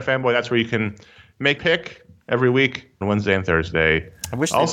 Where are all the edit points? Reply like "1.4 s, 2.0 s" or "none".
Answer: 1.6 s, 3.0 s